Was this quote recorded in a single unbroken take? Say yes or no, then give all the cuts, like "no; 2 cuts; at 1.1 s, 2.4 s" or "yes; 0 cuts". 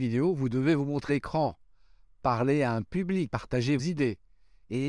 no; 3 cuts; at 1.1 s, 3.3 s, 3.8 s